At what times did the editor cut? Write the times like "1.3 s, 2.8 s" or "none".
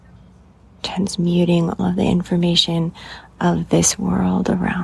1.8 s